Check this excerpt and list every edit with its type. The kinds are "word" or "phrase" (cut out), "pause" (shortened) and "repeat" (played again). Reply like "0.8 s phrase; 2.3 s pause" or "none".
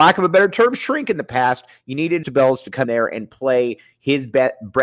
2.2 s word; 2.8 s word